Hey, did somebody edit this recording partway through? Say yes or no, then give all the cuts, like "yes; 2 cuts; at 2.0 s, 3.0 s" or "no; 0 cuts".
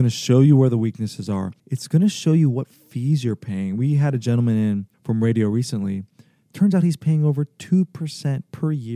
yes; 2 cuts; at 1.6 s, 4.9 s